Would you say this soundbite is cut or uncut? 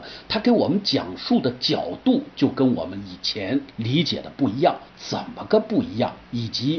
cut